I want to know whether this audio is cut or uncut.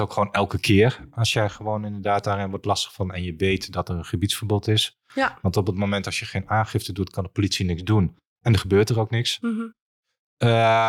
uncut